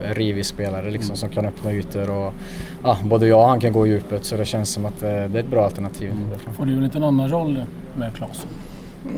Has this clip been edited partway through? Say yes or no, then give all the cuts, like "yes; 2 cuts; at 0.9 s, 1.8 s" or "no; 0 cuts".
no; 0 cuts